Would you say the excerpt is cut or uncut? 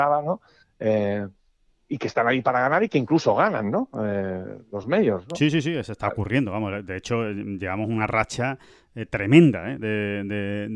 uncut